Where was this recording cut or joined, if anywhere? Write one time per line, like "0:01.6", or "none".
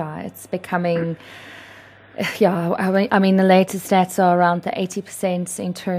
none